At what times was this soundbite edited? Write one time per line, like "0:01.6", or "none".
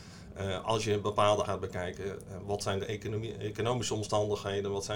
0:01.4